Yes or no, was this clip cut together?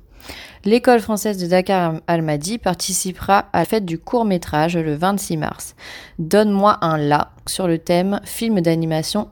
yes